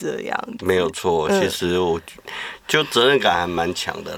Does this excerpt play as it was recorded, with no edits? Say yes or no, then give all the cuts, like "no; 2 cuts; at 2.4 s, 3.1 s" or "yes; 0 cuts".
yes; 0 cuts